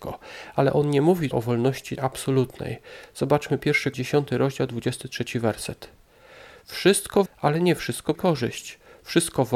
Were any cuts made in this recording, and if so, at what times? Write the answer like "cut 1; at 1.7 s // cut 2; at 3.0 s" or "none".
cut 1; at 1.3 s // cut 2; at 2.0 s // cut 3; at 3.9 s // cut 4; at 7.3 s // cut 5; at 8.1 s